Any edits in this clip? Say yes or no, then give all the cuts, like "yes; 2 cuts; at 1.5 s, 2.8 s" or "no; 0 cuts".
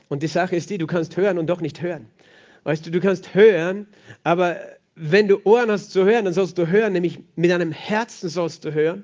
no; 0 cuts